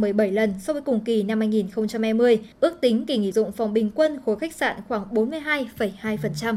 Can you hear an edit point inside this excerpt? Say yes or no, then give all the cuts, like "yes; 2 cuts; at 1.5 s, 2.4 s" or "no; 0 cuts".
yes; 2 cuts; at 2.5 s, 3.3 s